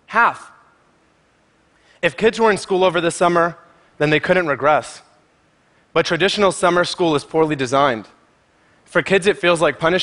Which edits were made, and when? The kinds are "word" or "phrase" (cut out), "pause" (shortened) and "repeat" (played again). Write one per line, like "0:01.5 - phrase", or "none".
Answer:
none